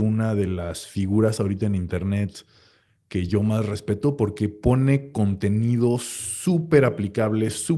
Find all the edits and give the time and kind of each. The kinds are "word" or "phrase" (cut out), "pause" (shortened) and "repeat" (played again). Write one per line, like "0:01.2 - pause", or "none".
none

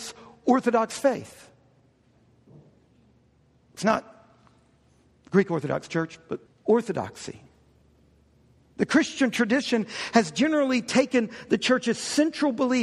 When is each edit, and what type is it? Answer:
0:03.8 - phrase
0:06.5 - pause

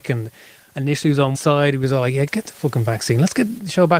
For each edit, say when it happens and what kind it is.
0:01.3 - word
0:02.3 - word

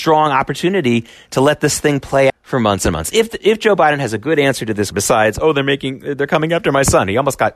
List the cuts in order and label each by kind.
0:02.3 - word
0:04.9 - word

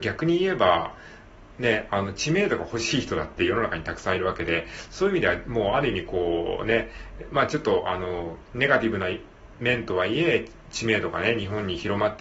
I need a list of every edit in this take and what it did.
none

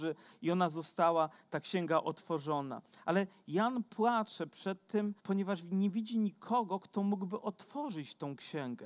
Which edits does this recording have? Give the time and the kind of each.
0:05.2 - pause

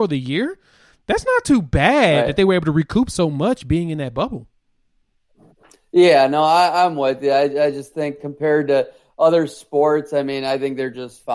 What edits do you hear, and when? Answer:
none

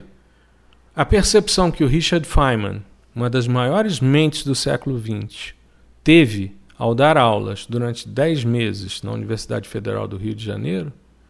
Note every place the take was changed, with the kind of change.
none

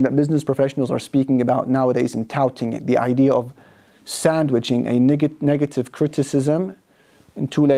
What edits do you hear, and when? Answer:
none

